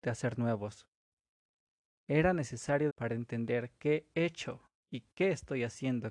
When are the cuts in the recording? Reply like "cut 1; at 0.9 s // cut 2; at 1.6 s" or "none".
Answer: cut 1; at 2.9 s // cut 2; at 4.1 s